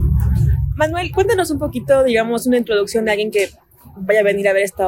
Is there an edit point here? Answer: no; 0 cuts

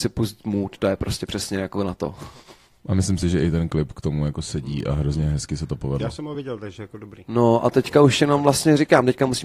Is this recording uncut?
yes; 0 cuts

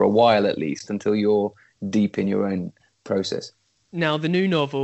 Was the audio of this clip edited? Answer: no; 0 cuts

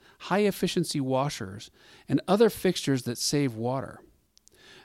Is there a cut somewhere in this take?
no; 0 cuts

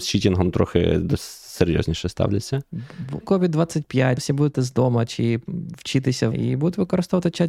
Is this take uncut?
no; 5 cuts; at 1.2 s, 3.2 s, 4.2 s, 4.5 s, 6.3 s

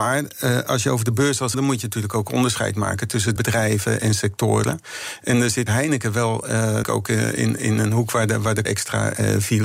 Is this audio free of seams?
no; 5 cuts; at 1.5 s, 3.4 s, 5.7 s, 6.8 s, 8.7 s

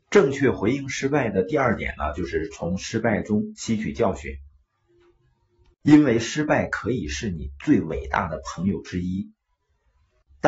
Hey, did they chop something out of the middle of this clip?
no; 0 cuts

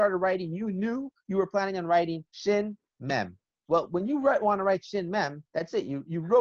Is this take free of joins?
no; 2 cuts; at 2.3 s, 5.5 s

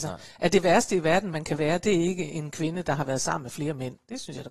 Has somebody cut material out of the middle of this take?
no; 0 cuts

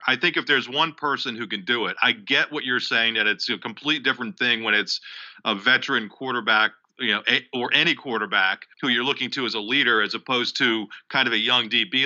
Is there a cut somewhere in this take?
yes; 1 cut; at 8.7 s

